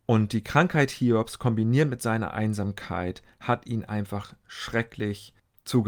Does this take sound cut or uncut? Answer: uncut